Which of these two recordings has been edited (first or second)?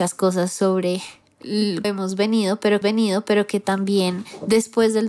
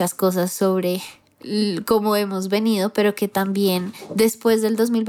first